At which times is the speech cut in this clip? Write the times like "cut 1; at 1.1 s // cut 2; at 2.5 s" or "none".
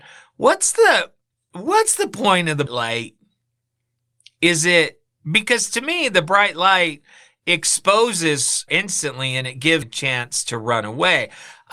cut 1; at 2.7 s // cut 2; at 8.7 s // cut 3; at 9.8 s